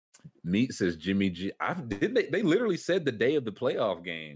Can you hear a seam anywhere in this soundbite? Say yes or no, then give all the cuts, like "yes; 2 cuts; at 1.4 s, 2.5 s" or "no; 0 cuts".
no; 0 cuts